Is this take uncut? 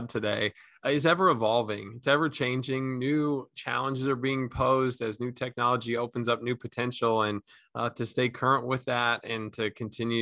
yes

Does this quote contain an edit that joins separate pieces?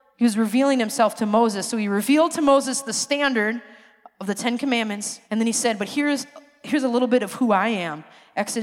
yes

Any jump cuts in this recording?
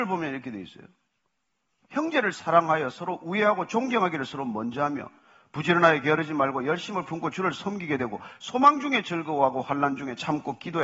no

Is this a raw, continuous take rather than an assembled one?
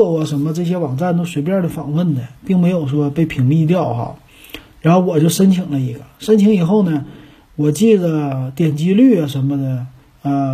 yes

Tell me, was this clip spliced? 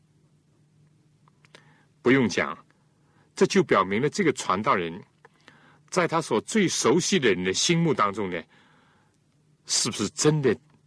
no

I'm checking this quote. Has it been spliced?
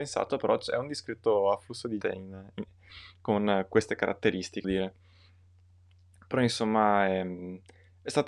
yes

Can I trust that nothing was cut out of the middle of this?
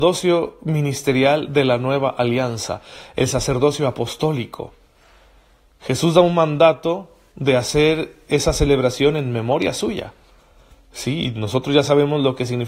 yes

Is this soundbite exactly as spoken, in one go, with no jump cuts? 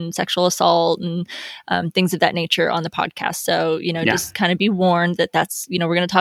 yes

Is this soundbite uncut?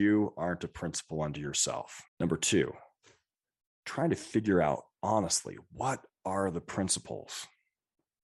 no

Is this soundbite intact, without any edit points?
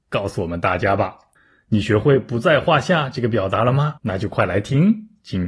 no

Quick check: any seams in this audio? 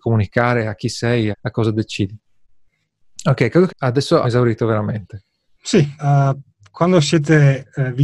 yes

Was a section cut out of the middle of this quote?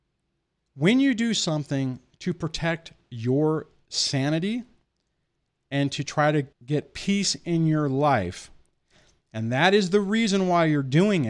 yes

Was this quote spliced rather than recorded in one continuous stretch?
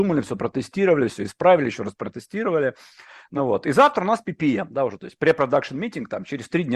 no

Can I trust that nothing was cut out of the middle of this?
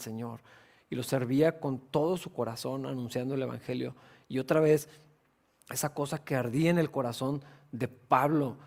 yes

